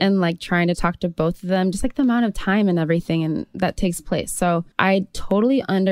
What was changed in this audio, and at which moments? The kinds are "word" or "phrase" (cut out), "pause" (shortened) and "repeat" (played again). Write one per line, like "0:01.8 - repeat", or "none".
0:04.7 - pause